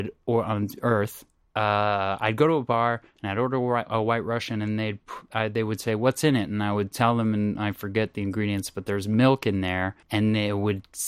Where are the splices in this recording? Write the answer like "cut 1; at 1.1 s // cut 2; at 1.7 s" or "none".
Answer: cut 1; at 1.4 s // cut 2; at 10.0 s